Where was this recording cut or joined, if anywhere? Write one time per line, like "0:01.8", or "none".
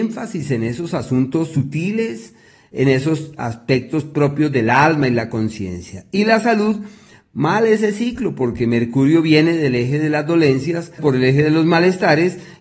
0:11.0